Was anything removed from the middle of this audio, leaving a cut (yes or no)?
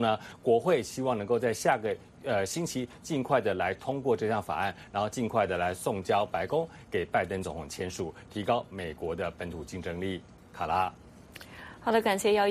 no